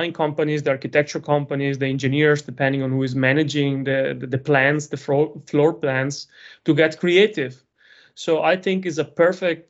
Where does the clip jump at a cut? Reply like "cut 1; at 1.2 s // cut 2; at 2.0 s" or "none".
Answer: none